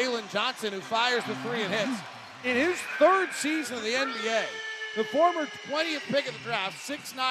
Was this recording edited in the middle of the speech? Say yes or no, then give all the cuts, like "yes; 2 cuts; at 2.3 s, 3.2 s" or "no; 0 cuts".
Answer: no; 0 cuts